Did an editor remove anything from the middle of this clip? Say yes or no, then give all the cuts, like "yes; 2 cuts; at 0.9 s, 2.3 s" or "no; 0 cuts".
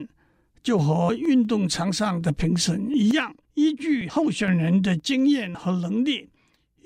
yes; 1 cut; at 3.4 s